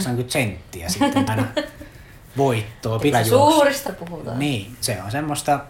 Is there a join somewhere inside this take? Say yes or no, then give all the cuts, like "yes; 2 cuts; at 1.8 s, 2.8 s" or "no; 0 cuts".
yes; 4 cuts; at 1.3 s, 3.1 s, 3.9 s, 4.8 s